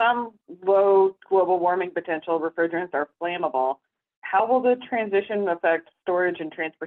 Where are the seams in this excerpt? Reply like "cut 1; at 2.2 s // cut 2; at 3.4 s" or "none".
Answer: none